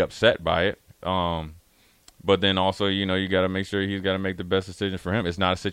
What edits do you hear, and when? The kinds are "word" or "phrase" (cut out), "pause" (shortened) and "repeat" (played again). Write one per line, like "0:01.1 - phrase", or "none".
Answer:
none